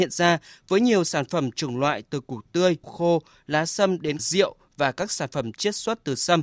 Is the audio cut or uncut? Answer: cut